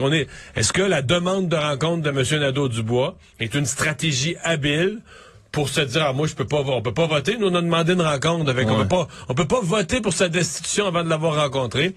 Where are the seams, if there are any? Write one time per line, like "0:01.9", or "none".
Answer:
none

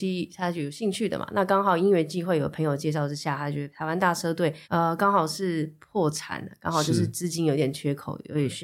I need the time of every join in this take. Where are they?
0:04.6

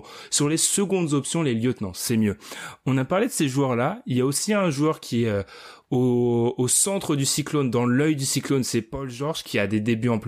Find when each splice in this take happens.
none

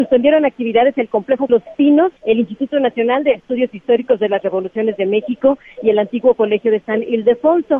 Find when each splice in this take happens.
0:01.5
0:02.2

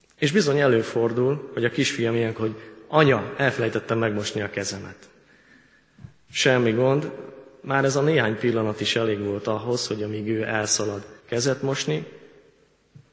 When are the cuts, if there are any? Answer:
0:02.4
0:11.2

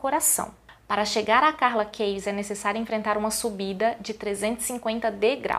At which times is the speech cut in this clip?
none

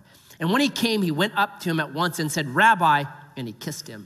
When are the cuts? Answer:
none

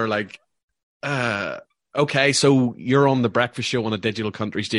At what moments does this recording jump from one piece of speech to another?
0:01.7

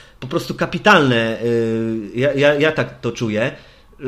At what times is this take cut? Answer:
none

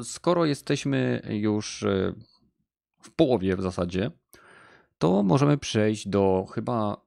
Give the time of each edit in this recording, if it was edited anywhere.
none

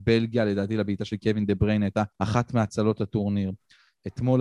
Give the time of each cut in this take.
0:02.1

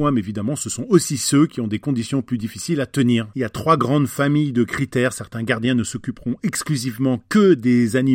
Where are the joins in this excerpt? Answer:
none

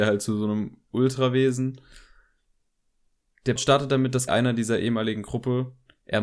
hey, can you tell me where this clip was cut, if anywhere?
0:03.6
0:04.3

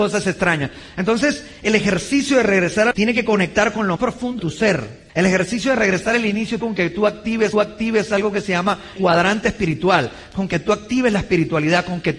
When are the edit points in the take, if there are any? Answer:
0:02.9
0:04.0
0:04.4
0:05.1
0:06.6
0:07.5
0:09.0

